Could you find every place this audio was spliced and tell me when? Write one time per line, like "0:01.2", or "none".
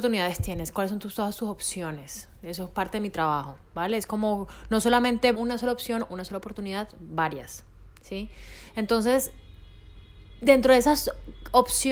0:05.3

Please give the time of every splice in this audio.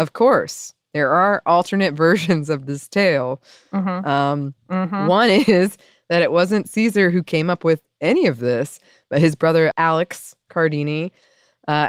0:04.6
0:09.7

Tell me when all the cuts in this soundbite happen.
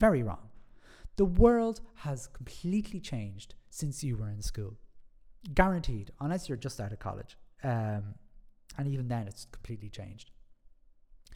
none

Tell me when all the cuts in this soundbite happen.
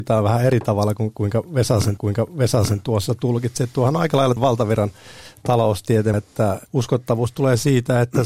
0:02.0
0:04.4
0:06.1
0:06.7

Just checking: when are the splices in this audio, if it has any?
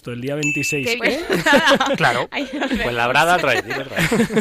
0:01.0
0:03.4

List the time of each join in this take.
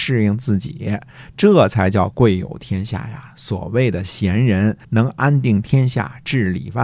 0:04.8

